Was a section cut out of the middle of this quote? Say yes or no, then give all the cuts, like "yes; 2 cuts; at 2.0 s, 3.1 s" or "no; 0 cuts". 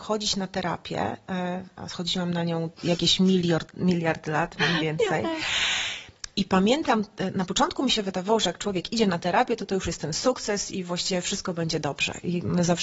yes; 1 cut; at 2.7 s